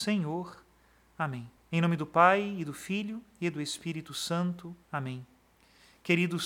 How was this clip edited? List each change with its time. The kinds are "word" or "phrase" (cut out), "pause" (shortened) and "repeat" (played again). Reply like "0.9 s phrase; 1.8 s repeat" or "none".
1.6 s pause; 4.8 s pause